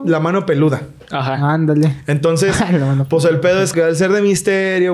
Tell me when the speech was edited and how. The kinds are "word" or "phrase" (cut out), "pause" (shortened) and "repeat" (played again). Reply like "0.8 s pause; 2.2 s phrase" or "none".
3.7 s word